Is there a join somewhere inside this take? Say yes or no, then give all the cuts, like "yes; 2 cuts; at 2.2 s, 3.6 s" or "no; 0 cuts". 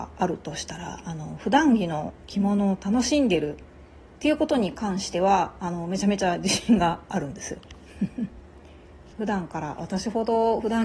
yes; 1 cut; at 9.1 s